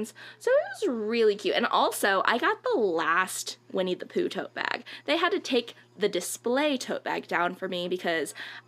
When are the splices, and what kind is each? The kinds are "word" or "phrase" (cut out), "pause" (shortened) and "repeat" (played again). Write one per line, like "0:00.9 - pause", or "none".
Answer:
none